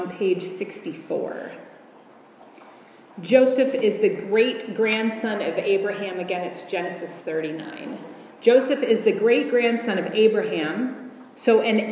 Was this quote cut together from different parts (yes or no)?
no